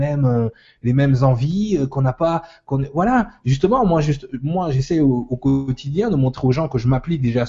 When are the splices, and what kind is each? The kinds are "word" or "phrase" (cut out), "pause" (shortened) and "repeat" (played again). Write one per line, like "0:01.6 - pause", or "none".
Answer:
none